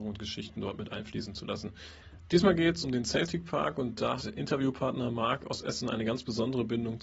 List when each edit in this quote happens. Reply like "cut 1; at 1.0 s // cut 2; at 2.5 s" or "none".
cut 1; at 2.8 s // cut 2; at 4.2 s